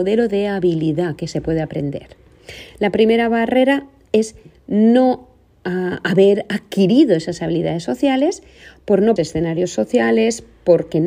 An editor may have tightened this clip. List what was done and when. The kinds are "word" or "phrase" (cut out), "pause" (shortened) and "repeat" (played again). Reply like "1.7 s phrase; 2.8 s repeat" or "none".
9.2 s word